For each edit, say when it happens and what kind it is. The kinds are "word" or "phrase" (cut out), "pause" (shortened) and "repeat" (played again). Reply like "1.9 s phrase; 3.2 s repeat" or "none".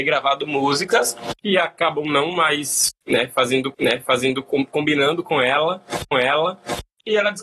1.4 s pause; 3.7 s repeat; 6.1 s repeat